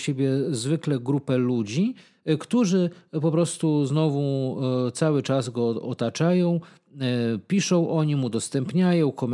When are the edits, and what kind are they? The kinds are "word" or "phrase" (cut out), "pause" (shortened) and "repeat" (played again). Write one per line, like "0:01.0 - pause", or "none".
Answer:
none